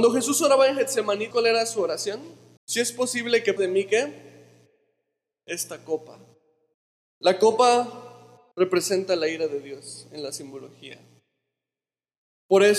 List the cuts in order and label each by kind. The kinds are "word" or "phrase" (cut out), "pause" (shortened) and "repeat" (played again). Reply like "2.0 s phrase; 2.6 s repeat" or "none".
1.3 s word; 2.6 s pause; 3.6 s word; 6.7 s pause; 8.5 s pause